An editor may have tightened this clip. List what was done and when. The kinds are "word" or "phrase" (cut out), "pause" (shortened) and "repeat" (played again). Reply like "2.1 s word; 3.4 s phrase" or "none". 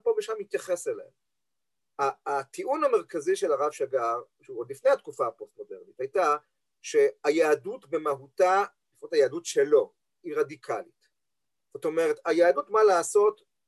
none